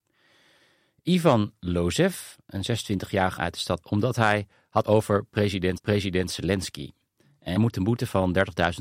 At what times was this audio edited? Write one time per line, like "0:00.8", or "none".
0:03.4
0:03.8
0:04.8
0:05.8
0:07.6